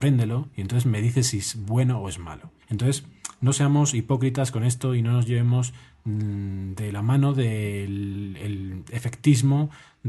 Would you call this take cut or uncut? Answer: cut